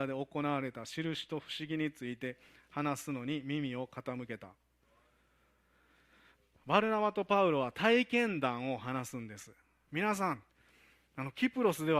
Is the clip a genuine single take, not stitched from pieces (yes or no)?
yes